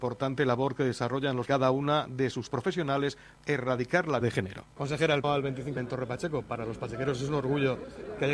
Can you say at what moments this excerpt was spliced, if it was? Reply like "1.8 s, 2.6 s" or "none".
1.5 s, 2.5 s, 3.4 s, 4.2 s, 5.2 s, 5.8 s